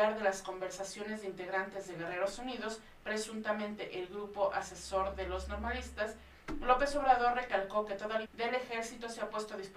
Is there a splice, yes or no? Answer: yes